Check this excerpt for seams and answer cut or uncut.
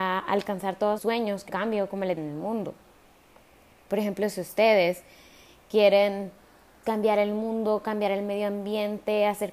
cut